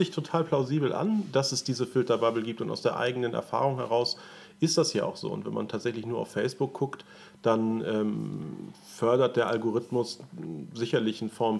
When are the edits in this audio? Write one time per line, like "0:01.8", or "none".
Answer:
none